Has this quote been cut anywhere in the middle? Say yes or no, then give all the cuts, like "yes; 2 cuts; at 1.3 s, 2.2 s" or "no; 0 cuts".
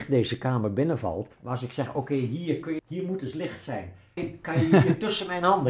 yes; 3 cuts; at 1.3 s, 2.8 s, 4.2 s